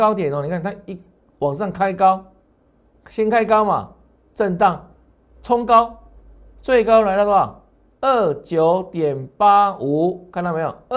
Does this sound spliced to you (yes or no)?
no